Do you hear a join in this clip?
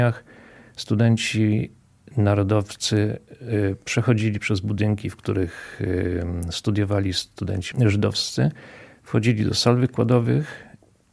no; 0 cuts

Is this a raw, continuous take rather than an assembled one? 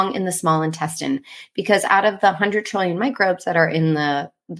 yes; 0 cuts

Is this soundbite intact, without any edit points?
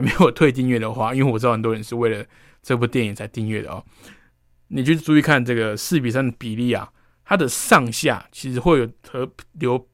yes; 0 cuts

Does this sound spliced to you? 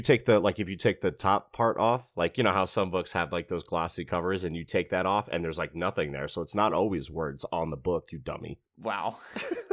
no; 0 cuts

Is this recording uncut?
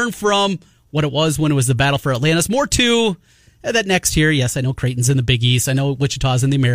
yes; 0 cuts

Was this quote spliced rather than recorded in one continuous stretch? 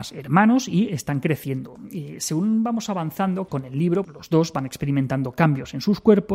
yes; 2 cuts; at 3.5 s, 4.0 s

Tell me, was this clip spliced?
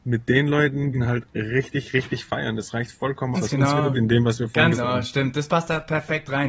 yes; 4 cuts; at 0.9 s, 3.3 s, 3.9 s, 4.7 s

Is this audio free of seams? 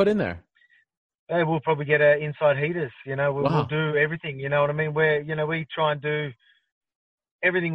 yes; 0 cuts

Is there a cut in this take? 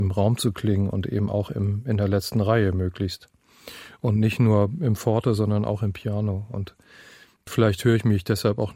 no; 0 cuts

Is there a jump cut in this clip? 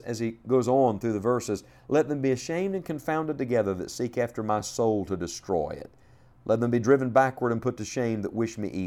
no; 0 cuts

